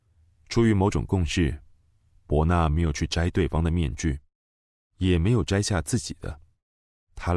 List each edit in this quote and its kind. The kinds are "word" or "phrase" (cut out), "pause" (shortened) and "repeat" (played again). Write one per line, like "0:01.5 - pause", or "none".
none